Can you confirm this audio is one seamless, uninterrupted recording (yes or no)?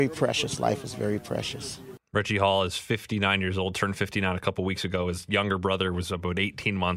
yes